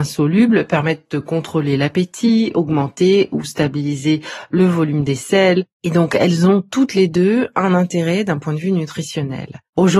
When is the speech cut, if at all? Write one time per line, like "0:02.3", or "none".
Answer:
none